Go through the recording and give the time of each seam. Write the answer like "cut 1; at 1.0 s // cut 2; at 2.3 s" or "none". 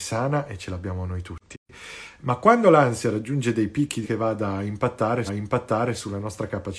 cut 1; at 4.0 s // cut 2; at 5.3 s